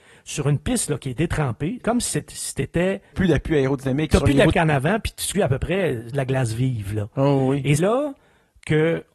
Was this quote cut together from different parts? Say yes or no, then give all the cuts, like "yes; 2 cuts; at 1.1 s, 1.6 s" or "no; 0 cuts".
yes; 6 cuts; at 1.8 s, 3.1 s, 4.5 s, 5.3 s, 6.1 s, 7.8 s